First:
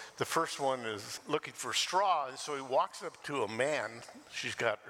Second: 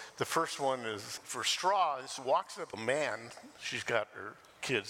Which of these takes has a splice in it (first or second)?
second